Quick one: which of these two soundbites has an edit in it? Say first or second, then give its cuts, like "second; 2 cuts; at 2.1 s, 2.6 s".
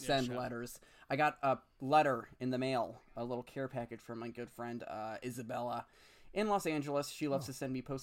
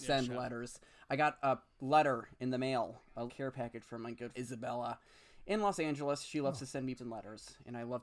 second; 3 cuts; at 3.3 s, 4.3 s, 7.0 s